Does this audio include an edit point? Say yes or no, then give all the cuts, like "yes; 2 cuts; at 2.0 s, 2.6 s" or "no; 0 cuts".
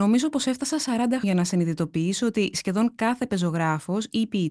yes; 1 cut; at 1.2 s